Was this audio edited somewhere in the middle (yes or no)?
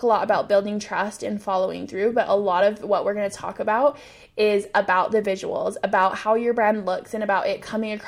no